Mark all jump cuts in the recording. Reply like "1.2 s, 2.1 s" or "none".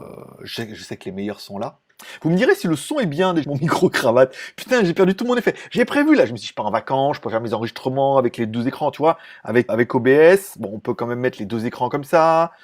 3.4 s, 9.7 s